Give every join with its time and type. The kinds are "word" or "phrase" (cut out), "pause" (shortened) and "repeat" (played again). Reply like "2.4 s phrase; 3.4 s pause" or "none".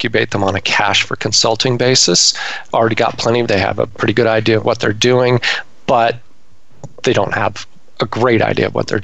2.7 s phrase; 3.5 s phrase